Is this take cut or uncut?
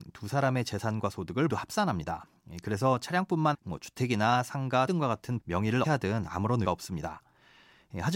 cut